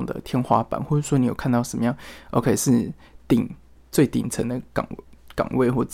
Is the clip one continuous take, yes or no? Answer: yes